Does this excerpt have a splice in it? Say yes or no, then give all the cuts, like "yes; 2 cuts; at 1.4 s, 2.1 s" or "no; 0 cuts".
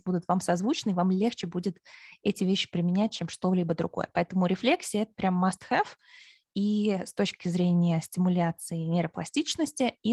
no; 0 cuts